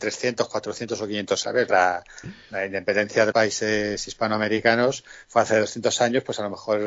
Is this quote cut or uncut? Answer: cut